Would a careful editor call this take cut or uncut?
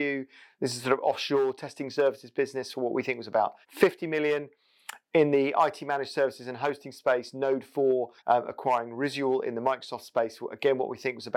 cut